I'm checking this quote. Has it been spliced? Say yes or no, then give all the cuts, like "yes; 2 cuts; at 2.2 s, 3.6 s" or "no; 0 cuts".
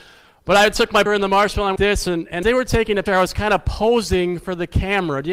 yes; 4 cuts; at 1.1 s, 1.8 s, 2.4 s, 3.1 s